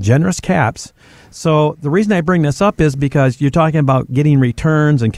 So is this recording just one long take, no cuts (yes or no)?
yes